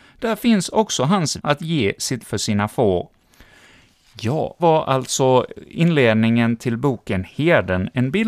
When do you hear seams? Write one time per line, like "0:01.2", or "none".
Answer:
0:01.4
0:02.2
0:04.6